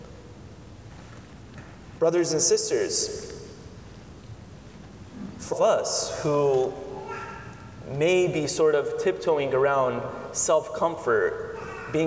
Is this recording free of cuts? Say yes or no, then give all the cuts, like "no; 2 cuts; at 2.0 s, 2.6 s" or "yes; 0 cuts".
no; 1 cut; at 5.5 s